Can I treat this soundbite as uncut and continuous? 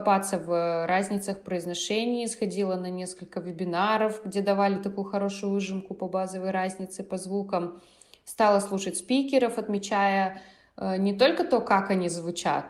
yes; 0 cuts

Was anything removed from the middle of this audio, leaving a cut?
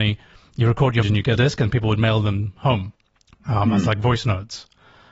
yes; 3 cuts; at 1.0 s, 1.4 s, 3.1 s

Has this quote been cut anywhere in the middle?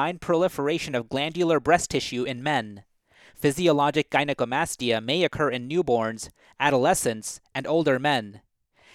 no; 0 cuts

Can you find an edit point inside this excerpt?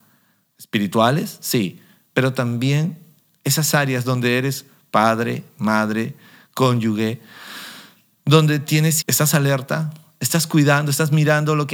yes; 1 cut; at 9.0 s

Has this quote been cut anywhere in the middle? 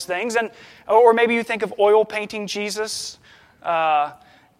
no; 0 cuts

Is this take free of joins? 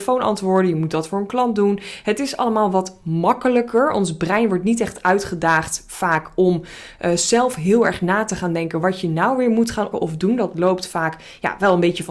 no; 1 cut; at 9.9 s

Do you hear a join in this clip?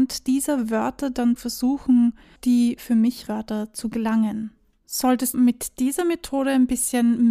yes; 4 cuts; at 1.4 s, 2.4 s, 3.3 s, 5.3 s

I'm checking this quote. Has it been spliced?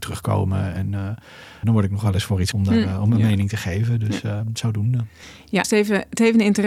yes; 3 cuts; at 1.6 s, 2.5 s, 5.6 s

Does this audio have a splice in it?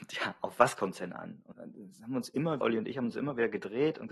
yes; 2 cuts; at 1.5 s, 2.6 s

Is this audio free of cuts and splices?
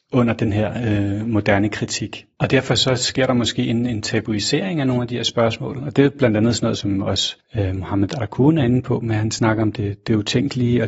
yes; 0 cuts

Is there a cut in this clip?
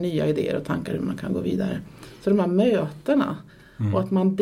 no; 0 cuts

